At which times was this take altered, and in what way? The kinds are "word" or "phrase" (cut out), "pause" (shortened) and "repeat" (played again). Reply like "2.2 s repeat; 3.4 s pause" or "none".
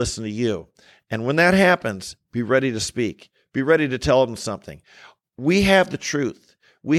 none